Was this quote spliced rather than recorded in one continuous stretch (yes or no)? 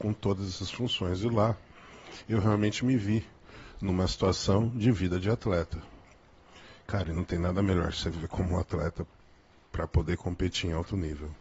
no